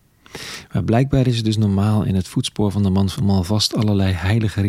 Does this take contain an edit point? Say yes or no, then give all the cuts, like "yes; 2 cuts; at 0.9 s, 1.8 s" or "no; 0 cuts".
yes; 1 cut; at 3.2 s